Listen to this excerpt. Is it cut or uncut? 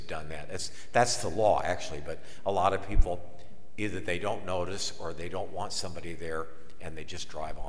uncut